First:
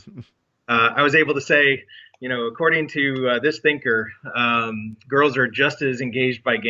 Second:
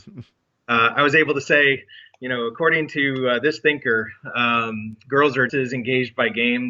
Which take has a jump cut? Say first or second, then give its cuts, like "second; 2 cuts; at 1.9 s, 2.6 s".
second; 1 cut; at 5.5 s